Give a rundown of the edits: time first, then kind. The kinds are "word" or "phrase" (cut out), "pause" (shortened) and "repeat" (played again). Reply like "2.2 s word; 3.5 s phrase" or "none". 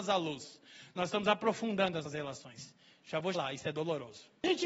2.0 s word; 3.3 s word

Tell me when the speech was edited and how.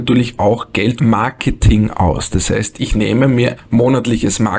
1.0 s word; 3.6 s word

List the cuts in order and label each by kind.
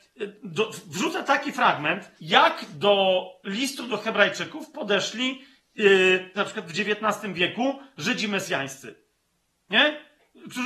2.2 s pause; 6.3 s phrase

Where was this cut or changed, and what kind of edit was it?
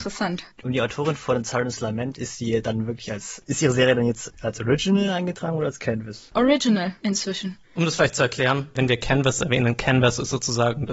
none

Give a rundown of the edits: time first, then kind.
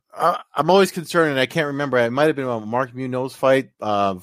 none

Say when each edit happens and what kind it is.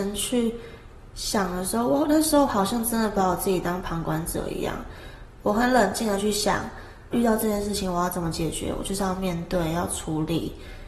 7.1 s word

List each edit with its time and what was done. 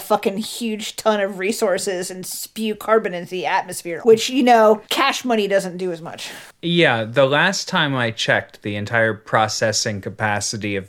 4.0 s word; 4.8 s pause

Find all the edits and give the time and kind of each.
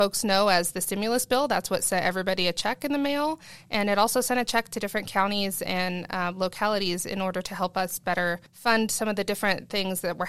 8.5 s pause

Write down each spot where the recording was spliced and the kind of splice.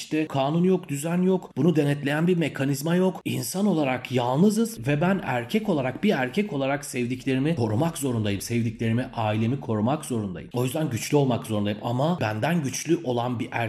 none

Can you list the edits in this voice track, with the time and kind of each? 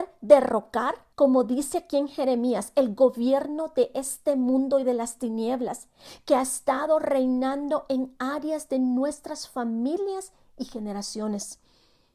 1.1 s pause

